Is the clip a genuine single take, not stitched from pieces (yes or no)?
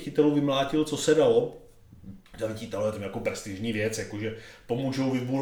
no